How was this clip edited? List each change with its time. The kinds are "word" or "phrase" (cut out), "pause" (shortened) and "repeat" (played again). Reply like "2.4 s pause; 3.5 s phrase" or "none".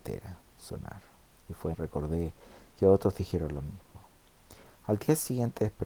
1.3 s pause; 1.7 s phrase